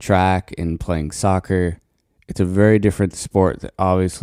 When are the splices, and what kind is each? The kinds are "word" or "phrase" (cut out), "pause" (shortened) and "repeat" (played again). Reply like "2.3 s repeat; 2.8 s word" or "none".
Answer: none